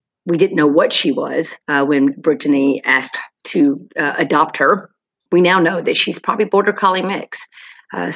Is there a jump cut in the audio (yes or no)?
yes